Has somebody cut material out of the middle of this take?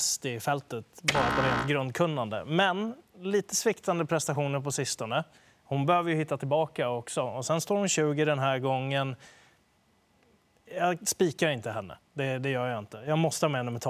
no; 0 cuts

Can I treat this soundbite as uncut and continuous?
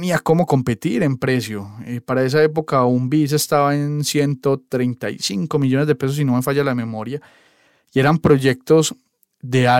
yes; 0 cuts

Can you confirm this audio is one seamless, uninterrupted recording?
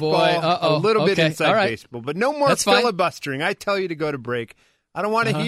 yes; 0 cuts

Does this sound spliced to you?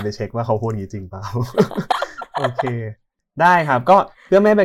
no; 0 cuts

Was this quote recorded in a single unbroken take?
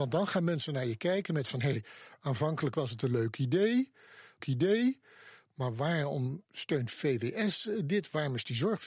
no; 2 cuts; at 4.4 s, 6.5 s

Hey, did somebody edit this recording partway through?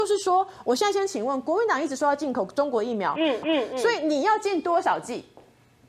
yes; 1 cut; at 3.4 s

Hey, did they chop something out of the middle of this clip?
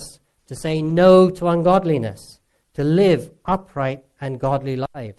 no; 0 cuts

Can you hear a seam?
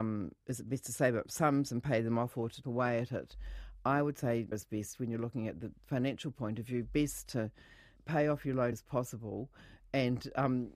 yes; 5 cuts; at 1.2 s, 2.6 s, 4.5 s, 8.0 s, 8.7 s

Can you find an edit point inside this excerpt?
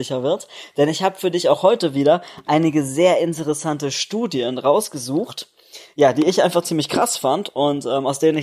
no; 0 cuts

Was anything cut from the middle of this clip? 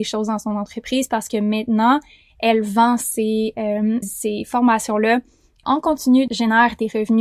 yes; 3 cuts; at 4.0 s, 5.6 s, 6.3 s

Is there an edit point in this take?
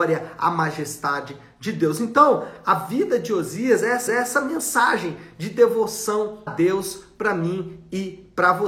yes; 2 cuts; at 4.1 s, 6.5 s

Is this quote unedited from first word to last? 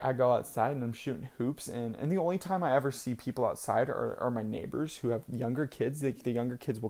yes; 0 cuts

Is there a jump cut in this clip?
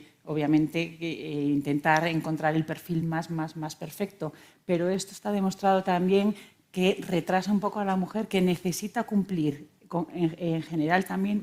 no; 0 cuts

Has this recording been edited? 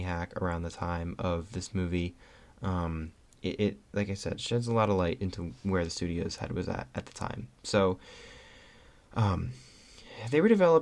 yes; 1 cut; at 5.2 s

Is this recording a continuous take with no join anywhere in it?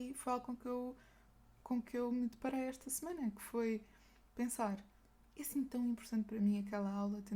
yes; 0 cuts

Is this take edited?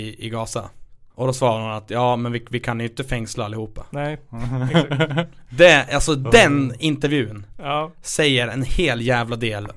yes; 1 cut; at 1.1 s

